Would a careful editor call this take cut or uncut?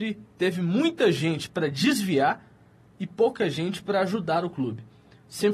uncut